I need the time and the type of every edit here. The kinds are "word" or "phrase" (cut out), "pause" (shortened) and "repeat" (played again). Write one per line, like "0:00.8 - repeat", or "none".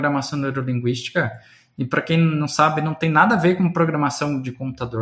none